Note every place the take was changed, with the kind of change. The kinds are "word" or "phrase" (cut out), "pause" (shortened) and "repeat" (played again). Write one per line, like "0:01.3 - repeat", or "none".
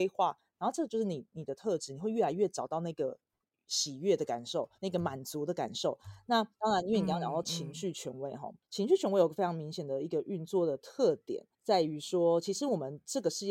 0:04.7 - pause
0:06.5 - pause
0:08.6 - pause
0:11.5 - pause

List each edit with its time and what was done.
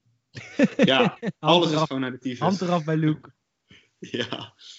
none

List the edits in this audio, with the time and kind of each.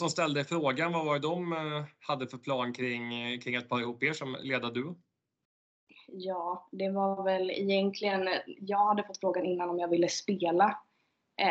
none

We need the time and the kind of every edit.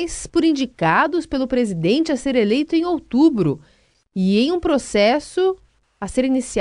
none

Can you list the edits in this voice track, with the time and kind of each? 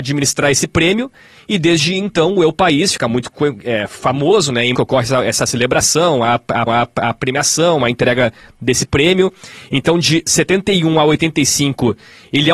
0:04.7 - word
0:06.7 - repeat

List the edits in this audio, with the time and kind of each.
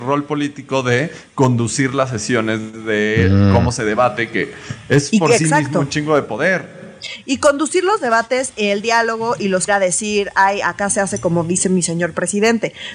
0:09.7 - phrase

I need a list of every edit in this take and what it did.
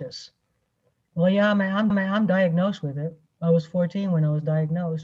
0:01.9 - repeat

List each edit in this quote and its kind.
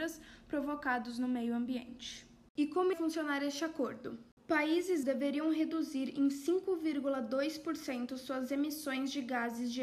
0:02.9 - word
0:05.0 - word

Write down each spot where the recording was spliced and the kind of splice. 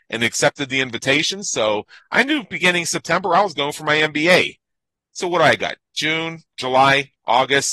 none

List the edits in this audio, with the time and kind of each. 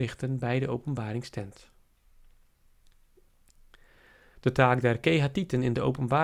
none

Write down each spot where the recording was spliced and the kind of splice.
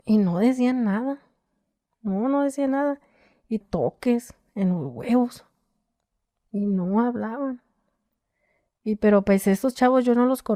0:03.6 - phrase

